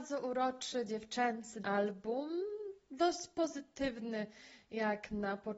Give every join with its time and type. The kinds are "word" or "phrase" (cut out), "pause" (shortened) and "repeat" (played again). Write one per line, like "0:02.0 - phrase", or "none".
0:01.6 - word